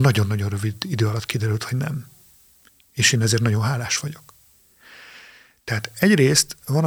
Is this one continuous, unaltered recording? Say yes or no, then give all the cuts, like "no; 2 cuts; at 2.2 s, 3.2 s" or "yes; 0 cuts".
yes; 0 cuts